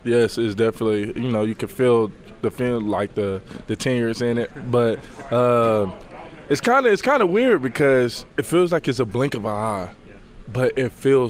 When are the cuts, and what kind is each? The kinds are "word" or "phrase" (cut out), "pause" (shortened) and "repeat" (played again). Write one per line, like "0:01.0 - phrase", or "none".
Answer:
0:08.3 - pause